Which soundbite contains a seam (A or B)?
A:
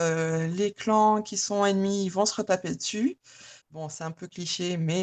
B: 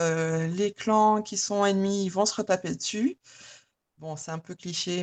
A